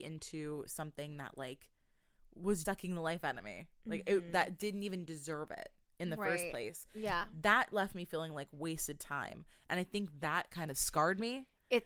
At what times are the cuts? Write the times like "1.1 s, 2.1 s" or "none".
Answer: 2.6 s

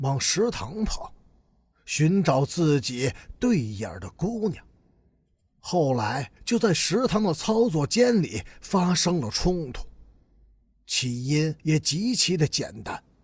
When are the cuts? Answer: 6.4 s, 11.6 s

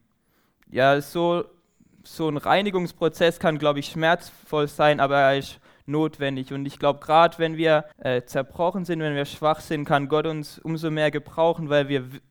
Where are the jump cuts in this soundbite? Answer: 7.9 s

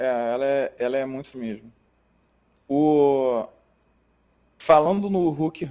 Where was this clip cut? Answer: 1.3 s

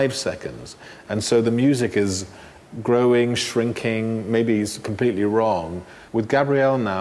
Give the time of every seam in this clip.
6.1 s

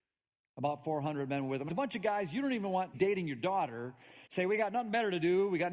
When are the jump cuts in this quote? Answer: 1.7 s, 2.9 s, 4.3 s

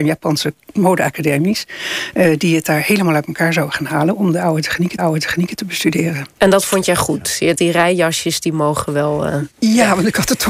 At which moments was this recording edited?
5.0 s, 6.3 s, 7.6 s

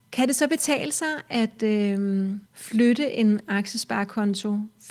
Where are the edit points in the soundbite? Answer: 2.5 s

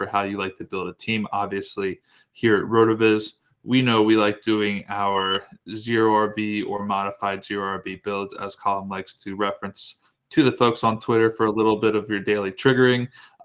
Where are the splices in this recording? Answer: none

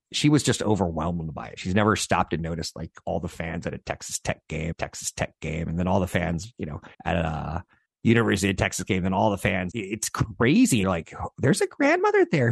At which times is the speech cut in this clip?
4.7 s, 6.9 s, 7.9 s, 9.7 s, 10.8 s

